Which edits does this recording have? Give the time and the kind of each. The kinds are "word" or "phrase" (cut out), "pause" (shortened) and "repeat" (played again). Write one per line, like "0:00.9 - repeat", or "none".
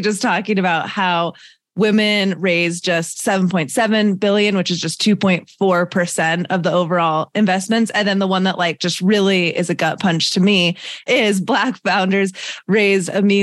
none